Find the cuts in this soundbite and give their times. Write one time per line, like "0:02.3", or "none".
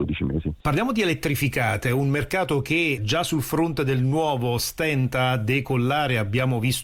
none